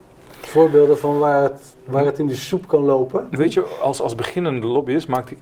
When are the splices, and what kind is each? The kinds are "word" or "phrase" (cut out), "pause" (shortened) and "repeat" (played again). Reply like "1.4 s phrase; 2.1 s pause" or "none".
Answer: 1.7 s pause; 3.4 s word